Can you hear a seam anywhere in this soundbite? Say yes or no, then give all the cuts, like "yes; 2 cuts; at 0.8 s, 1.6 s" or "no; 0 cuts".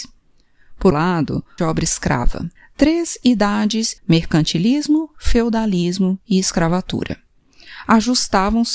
yes; 4 cuts; at 0.9 s, 1.6 s, 2.6 s, 4.0 s